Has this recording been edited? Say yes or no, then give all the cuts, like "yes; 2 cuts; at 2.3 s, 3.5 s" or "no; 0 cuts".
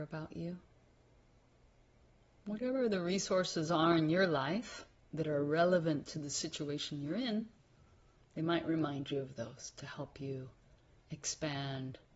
no; 0 cuts